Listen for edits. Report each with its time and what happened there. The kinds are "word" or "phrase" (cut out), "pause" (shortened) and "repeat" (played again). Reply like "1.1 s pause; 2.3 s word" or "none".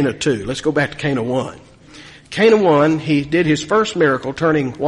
none